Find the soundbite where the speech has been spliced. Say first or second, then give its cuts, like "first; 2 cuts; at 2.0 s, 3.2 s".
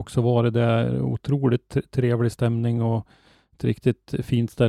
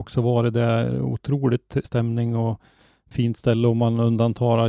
second; 2 cuts; at 1.8 s, 3.1 s